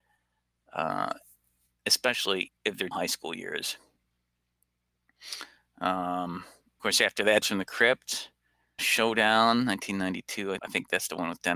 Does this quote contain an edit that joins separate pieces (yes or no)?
yes